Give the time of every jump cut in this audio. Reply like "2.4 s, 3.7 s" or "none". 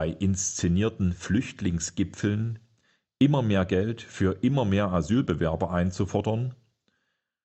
none